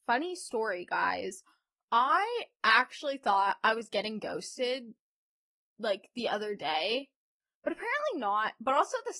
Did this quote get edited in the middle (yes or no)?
no